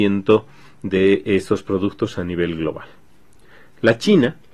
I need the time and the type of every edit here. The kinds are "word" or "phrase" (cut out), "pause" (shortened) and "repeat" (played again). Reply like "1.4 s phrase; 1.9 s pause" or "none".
none